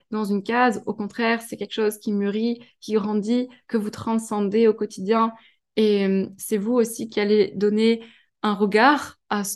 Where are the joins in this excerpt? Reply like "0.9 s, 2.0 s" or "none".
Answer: none